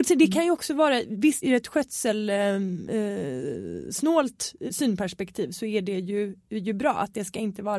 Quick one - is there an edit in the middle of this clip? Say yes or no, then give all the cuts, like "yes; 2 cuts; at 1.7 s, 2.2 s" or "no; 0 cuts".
yes; 2 cuts; at 1.4 s, 4.7 s